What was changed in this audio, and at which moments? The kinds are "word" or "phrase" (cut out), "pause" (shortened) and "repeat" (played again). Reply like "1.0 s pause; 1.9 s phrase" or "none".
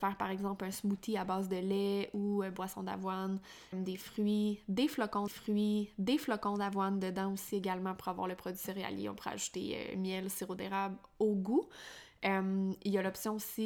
3.7 s word; 5.3 s repeat